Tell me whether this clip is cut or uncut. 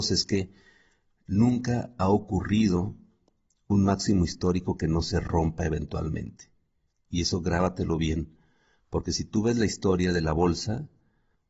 uncut